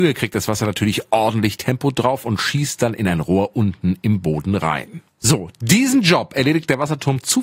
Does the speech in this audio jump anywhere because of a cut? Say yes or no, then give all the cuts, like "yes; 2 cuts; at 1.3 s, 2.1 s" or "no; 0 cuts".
no; 0 cuts